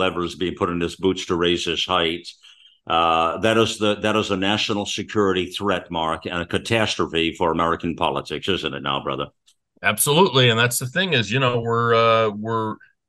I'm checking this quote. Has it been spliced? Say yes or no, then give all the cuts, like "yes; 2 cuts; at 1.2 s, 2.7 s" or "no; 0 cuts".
no; 0 cuts